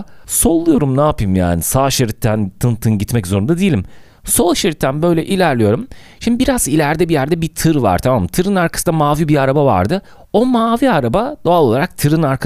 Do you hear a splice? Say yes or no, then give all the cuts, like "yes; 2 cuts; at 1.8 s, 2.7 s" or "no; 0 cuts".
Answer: no; 0 cuts